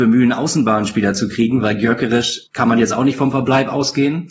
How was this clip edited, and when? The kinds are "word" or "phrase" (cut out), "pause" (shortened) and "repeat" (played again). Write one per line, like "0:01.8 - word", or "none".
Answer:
0:02.5 - pause